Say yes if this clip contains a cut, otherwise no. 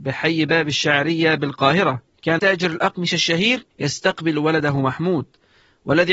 yes